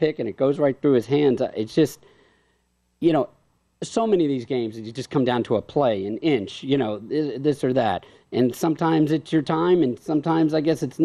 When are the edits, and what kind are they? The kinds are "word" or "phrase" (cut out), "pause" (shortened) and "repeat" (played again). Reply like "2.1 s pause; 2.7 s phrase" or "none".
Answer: none